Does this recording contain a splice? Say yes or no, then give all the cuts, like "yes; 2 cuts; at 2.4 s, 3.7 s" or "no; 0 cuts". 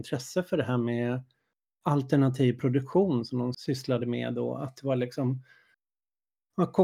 no; 0 cuts